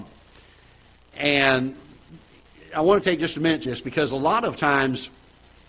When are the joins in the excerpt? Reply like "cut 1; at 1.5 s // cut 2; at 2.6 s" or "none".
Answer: cut 1; at 3.0 s // cut 2; at 3.6 s

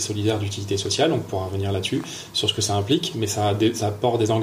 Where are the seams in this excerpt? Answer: none

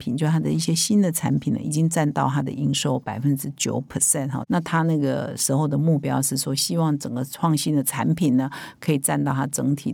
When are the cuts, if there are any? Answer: none

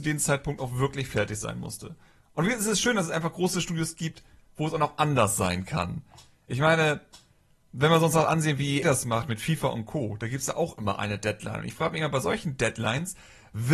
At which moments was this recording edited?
cut 1; at 8.8 s

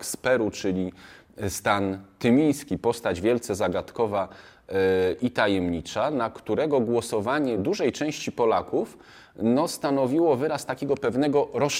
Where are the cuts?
none

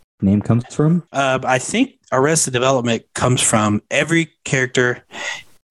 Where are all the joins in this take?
cut 1; at 1.1 s

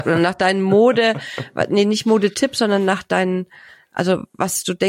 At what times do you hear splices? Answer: none

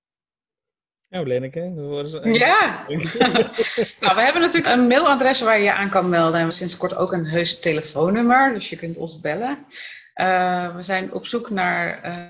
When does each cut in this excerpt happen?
cut 1; at 4.7 s // cut 2; at 6.5 s

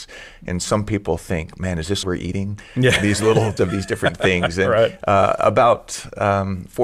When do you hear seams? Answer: cut 1; at 2.0 s // cut 2; at 3.6 s

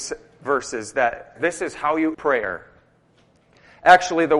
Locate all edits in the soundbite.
cut 1; at 1.4 s // cut 2; at 2.1 s

